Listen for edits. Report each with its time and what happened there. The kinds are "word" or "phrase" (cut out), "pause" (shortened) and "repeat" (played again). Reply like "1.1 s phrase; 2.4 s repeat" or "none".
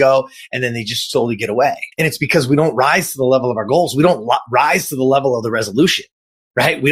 1.9 s pause